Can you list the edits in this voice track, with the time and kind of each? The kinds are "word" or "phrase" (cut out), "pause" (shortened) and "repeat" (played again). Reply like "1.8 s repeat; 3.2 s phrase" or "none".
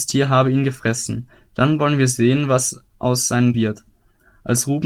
3.5 s word